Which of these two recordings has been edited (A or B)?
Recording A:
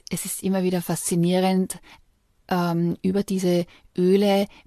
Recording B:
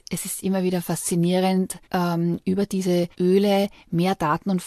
B